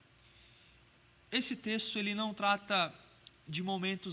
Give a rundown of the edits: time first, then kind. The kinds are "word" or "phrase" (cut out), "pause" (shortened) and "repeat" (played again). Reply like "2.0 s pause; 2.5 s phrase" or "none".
none